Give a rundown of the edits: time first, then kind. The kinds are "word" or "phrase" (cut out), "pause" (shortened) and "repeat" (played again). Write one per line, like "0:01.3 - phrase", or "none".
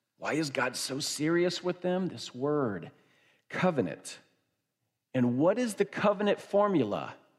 none